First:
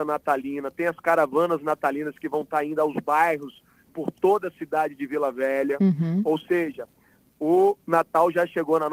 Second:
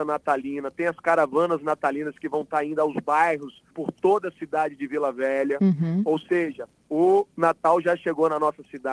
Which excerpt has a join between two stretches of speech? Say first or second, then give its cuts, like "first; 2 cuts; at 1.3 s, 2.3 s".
second; 2 cuts; at 3.7 s, 6.8 s